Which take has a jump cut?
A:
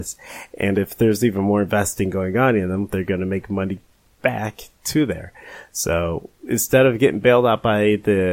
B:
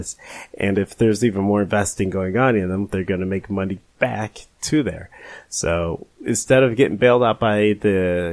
B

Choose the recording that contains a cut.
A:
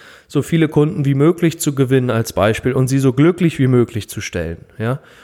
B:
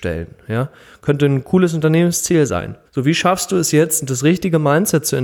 B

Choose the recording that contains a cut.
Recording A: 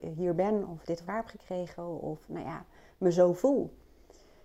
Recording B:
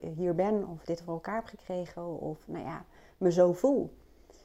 A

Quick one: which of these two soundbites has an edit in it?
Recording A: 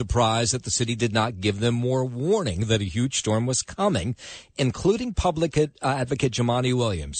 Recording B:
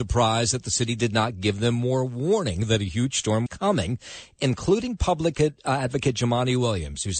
B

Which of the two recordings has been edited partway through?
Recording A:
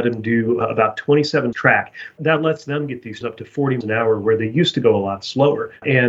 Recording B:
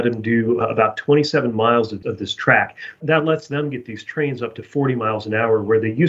A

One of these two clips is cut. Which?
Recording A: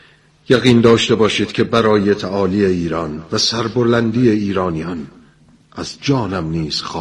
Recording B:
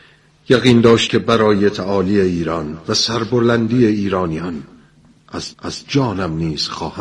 B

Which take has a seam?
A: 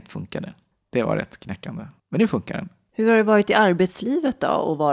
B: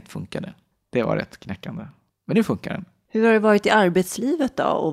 A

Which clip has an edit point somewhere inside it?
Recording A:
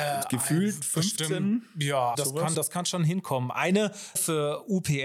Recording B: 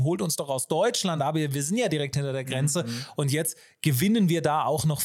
A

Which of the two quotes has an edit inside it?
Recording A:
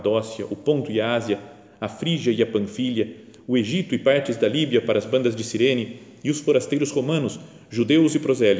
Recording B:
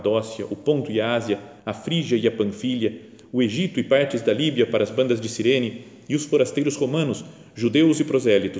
B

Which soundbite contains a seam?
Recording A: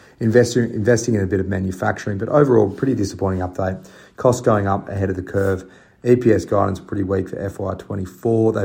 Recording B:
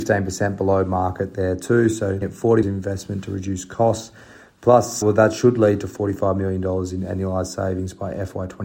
B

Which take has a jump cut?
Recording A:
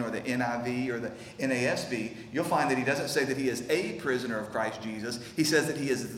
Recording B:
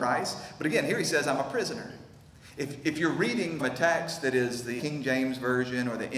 B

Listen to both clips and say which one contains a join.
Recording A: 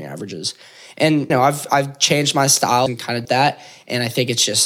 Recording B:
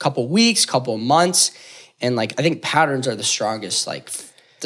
A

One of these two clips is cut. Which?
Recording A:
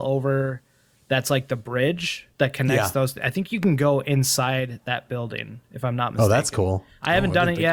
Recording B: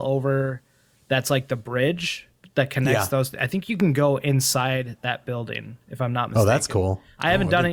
A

